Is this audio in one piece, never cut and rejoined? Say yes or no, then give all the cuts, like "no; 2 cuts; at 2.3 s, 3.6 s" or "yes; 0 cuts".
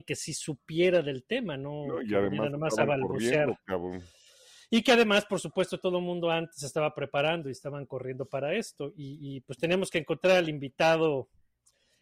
yes; 0 cuts